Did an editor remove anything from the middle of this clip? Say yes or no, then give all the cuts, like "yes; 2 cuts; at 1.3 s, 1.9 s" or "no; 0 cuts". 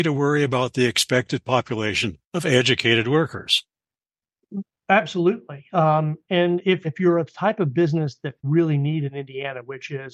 yes; 3 cuts; at 2.2 s, 6.8 s, 8.4 s